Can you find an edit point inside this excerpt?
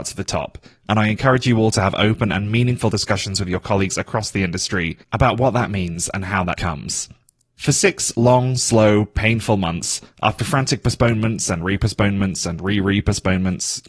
yes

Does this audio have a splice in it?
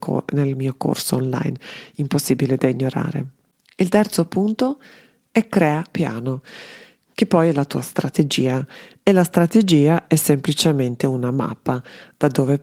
yes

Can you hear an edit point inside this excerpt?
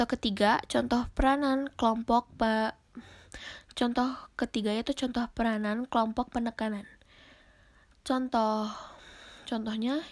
no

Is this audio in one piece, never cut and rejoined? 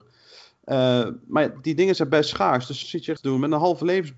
no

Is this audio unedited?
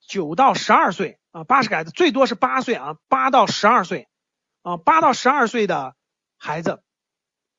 no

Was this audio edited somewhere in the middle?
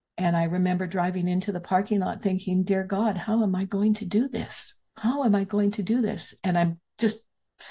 yes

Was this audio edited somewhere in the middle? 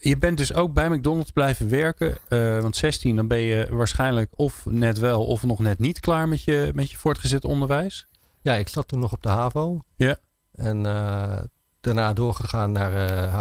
no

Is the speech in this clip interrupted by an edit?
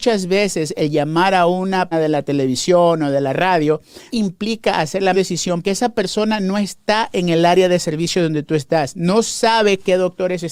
yes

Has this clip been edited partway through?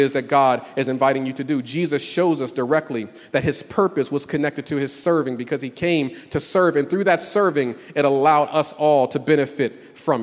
no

